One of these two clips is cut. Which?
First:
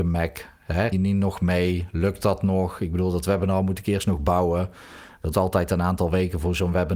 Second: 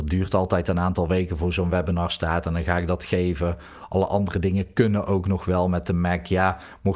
first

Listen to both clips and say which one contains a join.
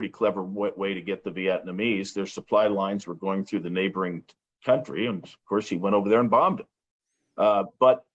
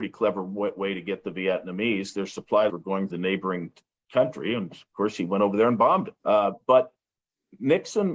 second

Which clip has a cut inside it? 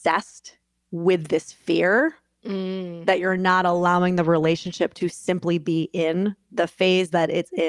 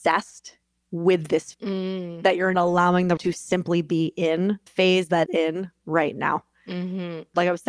second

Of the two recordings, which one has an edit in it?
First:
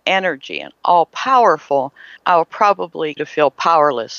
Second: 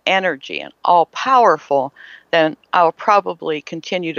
first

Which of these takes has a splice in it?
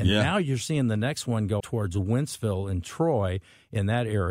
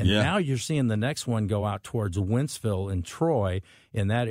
first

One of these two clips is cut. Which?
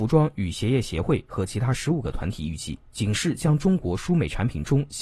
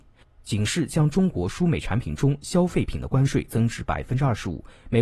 first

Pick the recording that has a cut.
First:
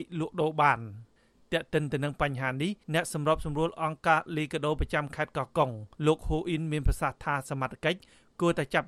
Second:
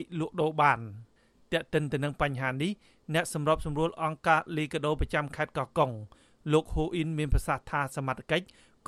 first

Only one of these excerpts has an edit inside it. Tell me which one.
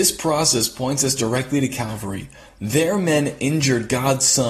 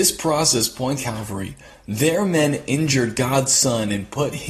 second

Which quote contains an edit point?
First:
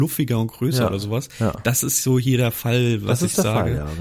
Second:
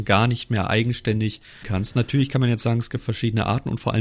second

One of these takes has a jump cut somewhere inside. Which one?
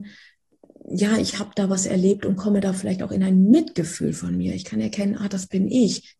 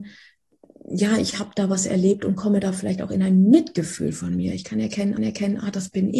second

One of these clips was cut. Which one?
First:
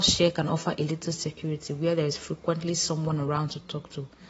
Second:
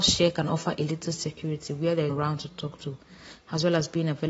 second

